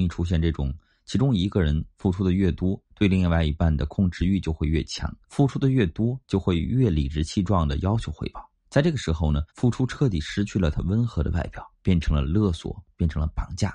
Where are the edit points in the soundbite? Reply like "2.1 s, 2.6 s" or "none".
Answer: 2.9 s, 5.2 s, 6.2 s, 8.6 s, 9.5 s, 11.8 s